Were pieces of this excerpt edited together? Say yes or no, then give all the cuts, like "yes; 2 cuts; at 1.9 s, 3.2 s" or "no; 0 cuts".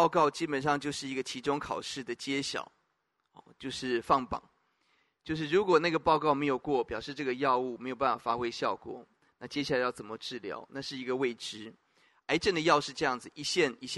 no; 0 cuts